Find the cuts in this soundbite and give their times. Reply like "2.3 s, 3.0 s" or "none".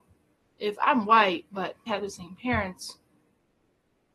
1.9 s